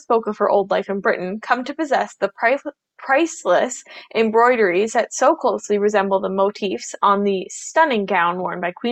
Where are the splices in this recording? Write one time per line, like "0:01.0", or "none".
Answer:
none

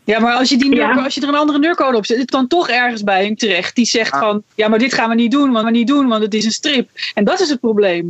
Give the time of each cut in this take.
0:02.3
0:03.4
0:04.5
0:05.6

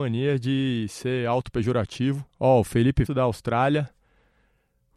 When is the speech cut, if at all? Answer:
0:02.3
0:03.1

